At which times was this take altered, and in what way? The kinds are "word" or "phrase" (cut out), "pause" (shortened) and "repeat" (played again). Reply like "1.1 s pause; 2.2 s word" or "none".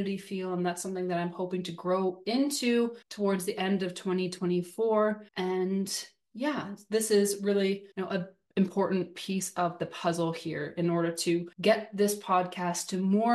3.0 s pause; 5.3 s pause; 7.9 s pause; 11.5 s pause